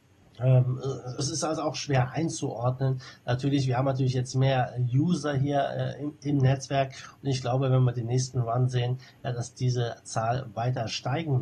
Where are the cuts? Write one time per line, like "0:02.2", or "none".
0:01.2